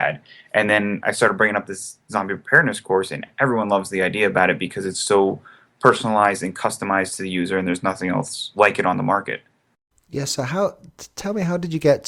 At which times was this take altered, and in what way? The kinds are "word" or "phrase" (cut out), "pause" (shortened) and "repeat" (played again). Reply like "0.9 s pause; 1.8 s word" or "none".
none